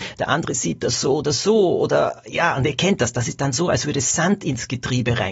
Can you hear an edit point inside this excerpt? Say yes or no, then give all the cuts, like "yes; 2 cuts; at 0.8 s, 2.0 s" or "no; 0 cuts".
no; 0 cuts